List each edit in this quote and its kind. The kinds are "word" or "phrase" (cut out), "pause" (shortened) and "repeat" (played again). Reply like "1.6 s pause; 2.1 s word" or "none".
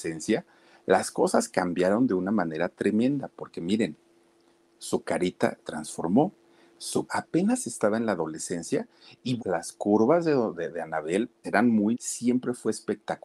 5.6 s word; 7.1 s word; 9.4 s word; 10.5 s word; 11.4 s word; 11.9 s word

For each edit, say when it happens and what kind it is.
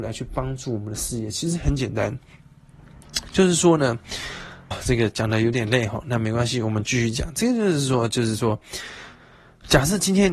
4.7 s word

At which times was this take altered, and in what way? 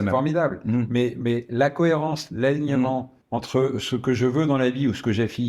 3.2 s pause

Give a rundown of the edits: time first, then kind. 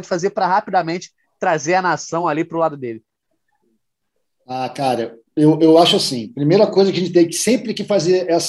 none

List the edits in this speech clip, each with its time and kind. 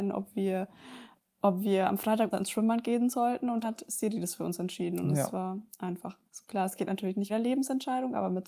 2.3 s phrase; 3.6 s word; 6.3 s pause; 7.3 s phrase

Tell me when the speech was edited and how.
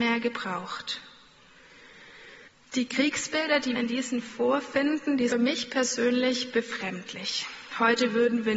2.5 s pause; 3.8 s word; 4.2 s word; 5.3 s phrase

